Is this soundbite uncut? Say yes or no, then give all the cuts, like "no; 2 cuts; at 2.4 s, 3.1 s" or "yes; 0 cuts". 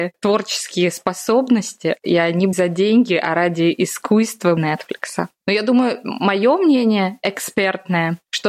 no; 2 cuts; at 2.5 s, 4.6 s